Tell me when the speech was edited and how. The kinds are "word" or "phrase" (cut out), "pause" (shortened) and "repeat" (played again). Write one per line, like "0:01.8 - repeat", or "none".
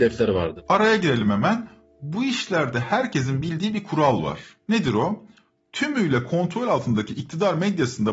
none